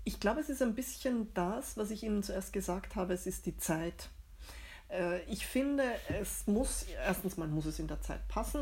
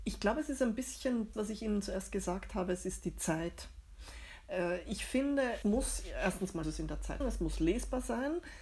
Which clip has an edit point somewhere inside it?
second; 4 cuts; at 1.3 s, 5.6 s, 6.6 s, 7.2 s

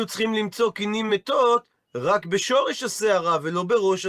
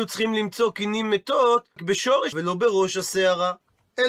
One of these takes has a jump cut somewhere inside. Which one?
second; 2 cuts; at 1.8 s, 2.3 s

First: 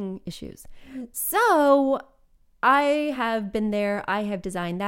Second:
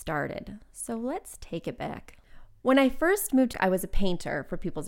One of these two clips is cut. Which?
second; 1 cut; at 3.5 s

